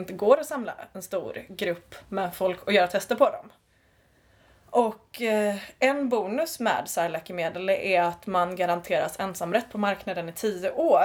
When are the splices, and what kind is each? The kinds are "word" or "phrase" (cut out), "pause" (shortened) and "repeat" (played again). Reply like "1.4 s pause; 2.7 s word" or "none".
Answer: none